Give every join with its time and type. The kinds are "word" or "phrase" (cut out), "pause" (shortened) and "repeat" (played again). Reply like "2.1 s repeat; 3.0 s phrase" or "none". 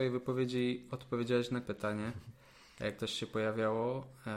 1.6 s word; 3.0 s word